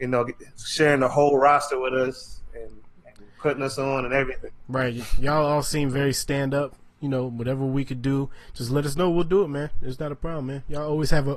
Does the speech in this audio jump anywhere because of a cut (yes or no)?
no